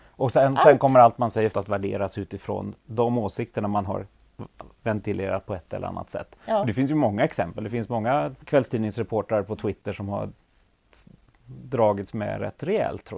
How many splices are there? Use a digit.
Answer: 2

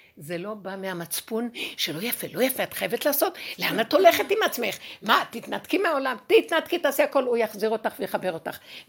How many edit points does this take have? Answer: 0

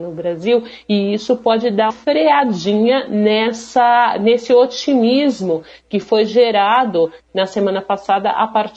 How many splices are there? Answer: 1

